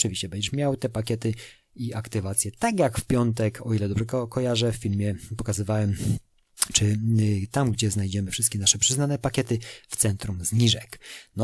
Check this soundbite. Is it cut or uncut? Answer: uncut